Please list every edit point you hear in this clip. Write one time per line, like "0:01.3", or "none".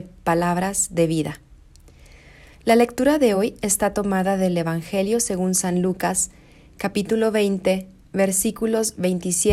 none